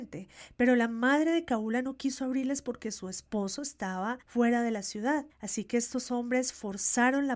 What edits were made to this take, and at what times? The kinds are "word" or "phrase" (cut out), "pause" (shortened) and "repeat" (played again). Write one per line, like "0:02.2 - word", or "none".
0:04.2 - pause
0:05.3 - pause